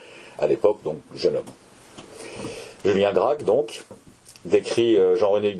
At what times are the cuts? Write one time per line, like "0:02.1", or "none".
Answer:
none